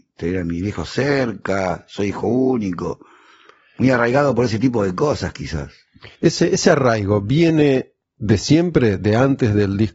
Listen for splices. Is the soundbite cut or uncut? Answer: cut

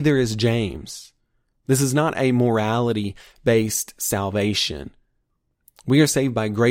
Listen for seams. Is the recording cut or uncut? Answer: uncut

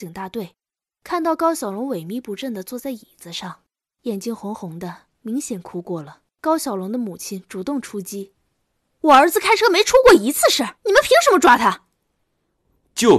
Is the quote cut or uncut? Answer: cut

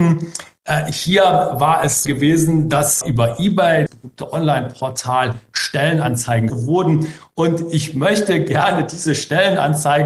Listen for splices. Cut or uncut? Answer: cut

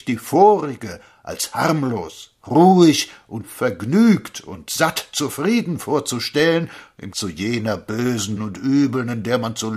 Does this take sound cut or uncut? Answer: cut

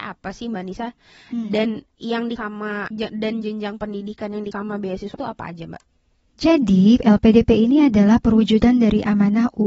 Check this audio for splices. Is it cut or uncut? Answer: cut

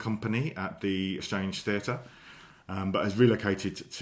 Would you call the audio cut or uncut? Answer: cut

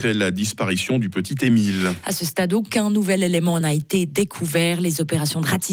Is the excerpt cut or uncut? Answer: uncut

